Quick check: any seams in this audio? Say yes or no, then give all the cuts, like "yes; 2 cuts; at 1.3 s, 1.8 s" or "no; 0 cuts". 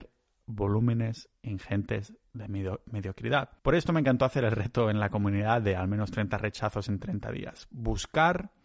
yes; 1 cut; at 3.6 s